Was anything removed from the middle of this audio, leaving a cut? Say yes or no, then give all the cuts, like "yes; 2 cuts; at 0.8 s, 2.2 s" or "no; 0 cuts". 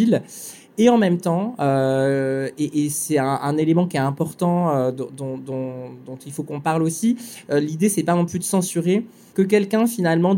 no; 0 cuts